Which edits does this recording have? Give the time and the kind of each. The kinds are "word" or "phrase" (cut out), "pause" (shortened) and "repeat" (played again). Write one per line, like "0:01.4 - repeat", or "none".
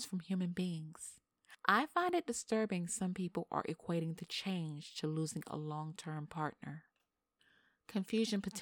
none